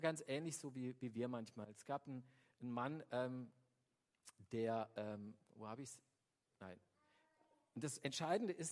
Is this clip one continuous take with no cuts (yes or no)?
yes